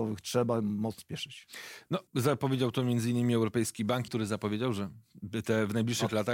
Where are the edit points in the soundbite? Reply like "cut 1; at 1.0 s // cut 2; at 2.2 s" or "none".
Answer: cut 1; at 1.0 s // cut 2; at 2.1 s // cut 3; at 4.1 s

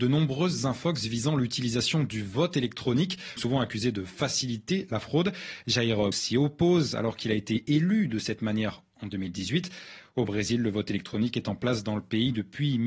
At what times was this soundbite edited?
cut 1; at 3.4 s // cut 2; at 6.1 s

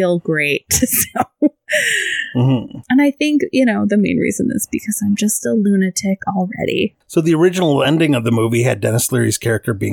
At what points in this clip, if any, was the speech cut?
none

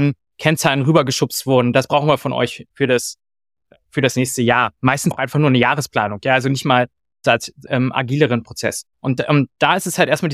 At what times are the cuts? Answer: cut 1; at 2.7 s // cut 2; at 5.1 s // cut 3; at 7.7 s // cut 4; at 8.9 s

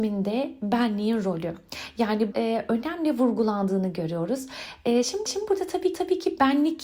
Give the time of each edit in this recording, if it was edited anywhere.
cut 1; at 2.3 s // cut 2; at 5.3 s // cut 3; at 5.9 s

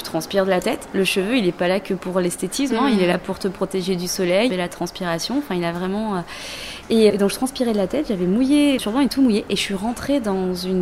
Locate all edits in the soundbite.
cut 1; at 4.5 s // cut 2; at 7.1 s // cut 3; at 8.8 s // cut 4; at 9.1 s

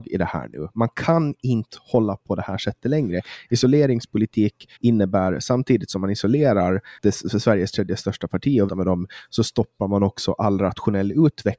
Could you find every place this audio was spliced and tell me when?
cut 1; at 2.2 s // cut 2; at 4.8 s // cut 3; at 7.0 s // cut 4; at 8.7 s

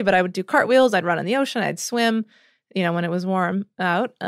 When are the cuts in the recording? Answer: none

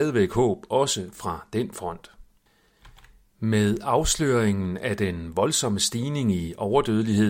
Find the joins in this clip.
none

